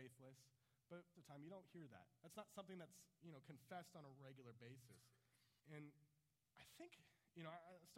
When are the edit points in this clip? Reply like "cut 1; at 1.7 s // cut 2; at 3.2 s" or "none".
cut 1; at 1.1 s // cut 2; at 5.6 s